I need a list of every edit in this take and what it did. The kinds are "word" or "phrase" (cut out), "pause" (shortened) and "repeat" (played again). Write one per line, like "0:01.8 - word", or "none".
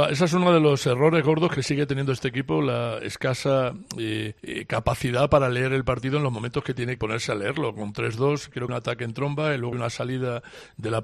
0:04.4 - pause
0:07.0 - word
0:08.7 - phrase
0:09.7 - word